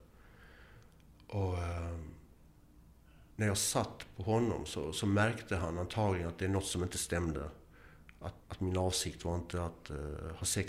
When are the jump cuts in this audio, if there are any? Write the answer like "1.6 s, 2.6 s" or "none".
3.3 s, 8.4 s